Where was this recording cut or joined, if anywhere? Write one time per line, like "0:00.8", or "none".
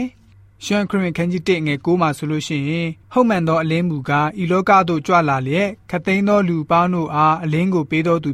0:03.0